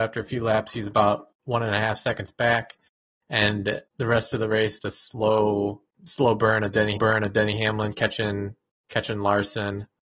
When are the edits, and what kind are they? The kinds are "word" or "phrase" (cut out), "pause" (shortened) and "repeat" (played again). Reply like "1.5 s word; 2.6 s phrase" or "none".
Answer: 1.3 s pause; 3.9 s pause; 4.8 s phrase; 5.9 s word; 7.0 s repeat; 8.8 s pause